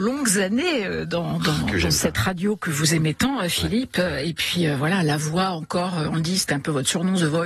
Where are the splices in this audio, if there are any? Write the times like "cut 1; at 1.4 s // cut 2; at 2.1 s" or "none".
none